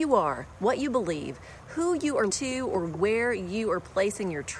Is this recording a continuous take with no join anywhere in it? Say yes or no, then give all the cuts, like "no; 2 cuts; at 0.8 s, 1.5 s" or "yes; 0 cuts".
no; 1 cut; at 2.3 s